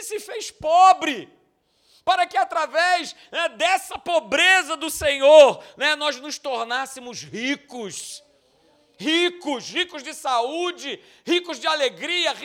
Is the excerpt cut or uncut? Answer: uncut